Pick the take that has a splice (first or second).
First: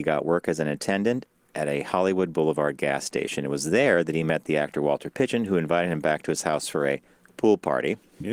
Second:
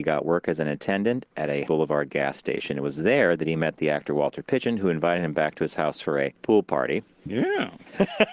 second